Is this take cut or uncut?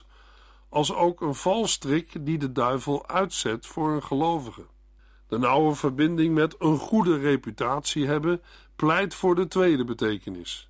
cut